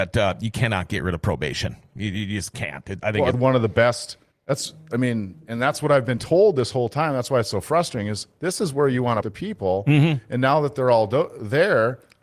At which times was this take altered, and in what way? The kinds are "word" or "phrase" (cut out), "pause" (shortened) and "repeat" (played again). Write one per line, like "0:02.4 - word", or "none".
0:03.0 - word
0:03.3 - word
0:04.3 - pause
0:09.2 - phrase